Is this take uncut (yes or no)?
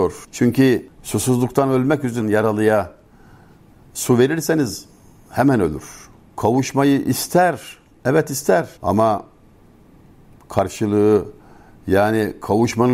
no